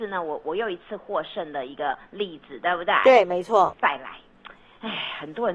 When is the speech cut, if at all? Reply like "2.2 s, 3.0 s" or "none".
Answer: none